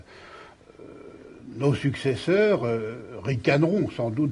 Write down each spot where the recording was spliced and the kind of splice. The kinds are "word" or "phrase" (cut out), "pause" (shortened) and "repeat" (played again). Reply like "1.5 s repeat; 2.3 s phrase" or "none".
none

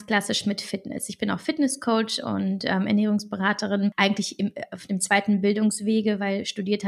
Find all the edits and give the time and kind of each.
none

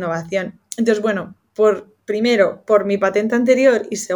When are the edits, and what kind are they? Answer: none

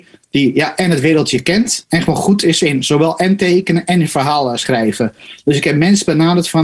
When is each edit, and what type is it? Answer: none

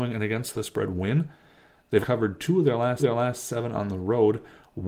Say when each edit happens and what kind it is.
2.0 s word; 3.0 s repeat

